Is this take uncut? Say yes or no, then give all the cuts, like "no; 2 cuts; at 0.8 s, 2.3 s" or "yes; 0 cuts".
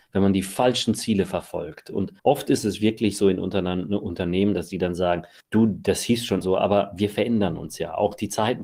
no; 3 cuts; at 2.2 s, 5.4 s, 6.4 s